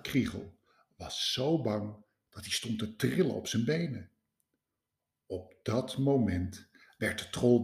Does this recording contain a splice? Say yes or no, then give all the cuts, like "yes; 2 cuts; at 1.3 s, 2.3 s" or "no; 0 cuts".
no; 0 cuts